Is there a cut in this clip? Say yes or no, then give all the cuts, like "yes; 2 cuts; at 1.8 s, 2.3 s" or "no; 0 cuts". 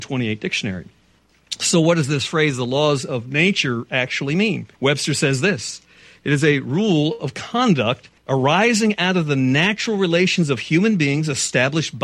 yes; 2 cuts; at 4.7 s, 8.2 s